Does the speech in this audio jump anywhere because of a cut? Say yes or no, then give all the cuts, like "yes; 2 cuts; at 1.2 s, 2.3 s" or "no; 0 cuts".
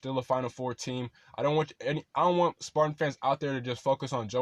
no; 0 cuts